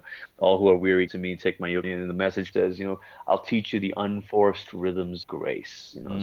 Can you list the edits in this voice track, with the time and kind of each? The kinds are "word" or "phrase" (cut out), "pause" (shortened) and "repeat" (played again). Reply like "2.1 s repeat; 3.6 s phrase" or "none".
1.1 s word; 1.8 s word; 2.5 s word; 5.2 s word